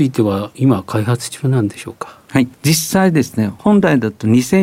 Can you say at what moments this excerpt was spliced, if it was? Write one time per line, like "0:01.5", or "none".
0:02.5